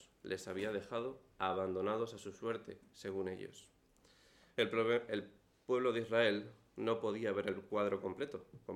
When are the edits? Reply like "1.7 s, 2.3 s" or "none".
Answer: none